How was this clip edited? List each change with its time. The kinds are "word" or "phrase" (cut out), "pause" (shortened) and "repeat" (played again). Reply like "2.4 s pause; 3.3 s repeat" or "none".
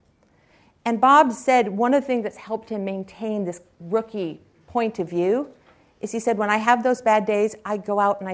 none

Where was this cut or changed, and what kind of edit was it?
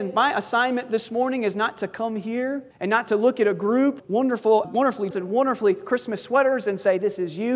2.7 s pause; 4.0 s word; 4.6 s word; 5.1 s word

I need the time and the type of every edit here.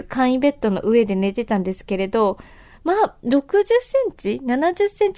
none

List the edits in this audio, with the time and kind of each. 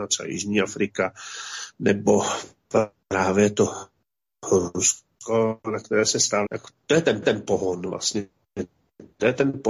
5.6 s pause; 6.5 s word; 7.2 s repeat

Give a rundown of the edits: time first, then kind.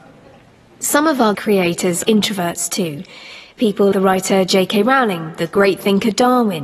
1.3 s word; 2.1 s word; 3.9 s word

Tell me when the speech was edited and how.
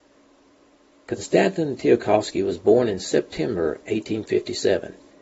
none

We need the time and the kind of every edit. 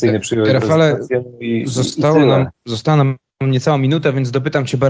2.6 s pause

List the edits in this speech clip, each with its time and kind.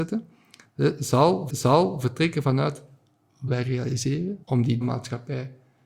1.5 s repeat; 3.5 s phrase; 4.4 s pause; 4.8 s word

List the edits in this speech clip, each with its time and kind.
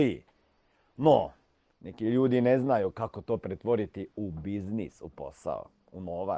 none

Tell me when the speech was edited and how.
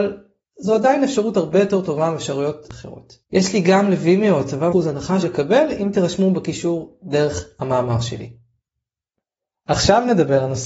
3.2 s pause; 4.7 s phrase; 5.2 s word

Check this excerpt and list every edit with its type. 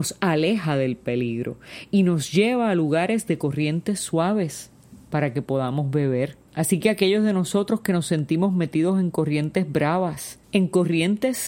6.5 s pause; 10.4 s pause

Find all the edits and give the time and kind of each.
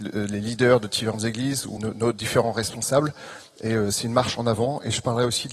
1.8 s word

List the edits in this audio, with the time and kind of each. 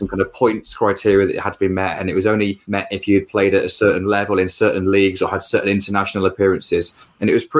2.6 s pause

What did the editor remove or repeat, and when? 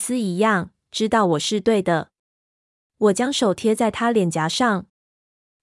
none

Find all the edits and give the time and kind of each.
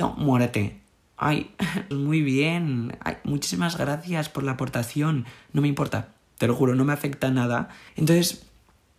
1.9 s word; 7.9 s pause

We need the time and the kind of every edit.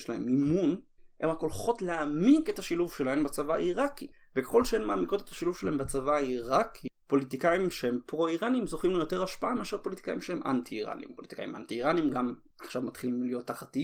none

